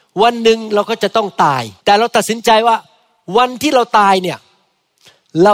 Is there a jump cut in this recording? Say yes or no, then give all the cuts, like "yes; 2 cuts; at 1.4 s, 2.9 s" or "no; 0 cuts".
yes; 1 cut; at 1.8 s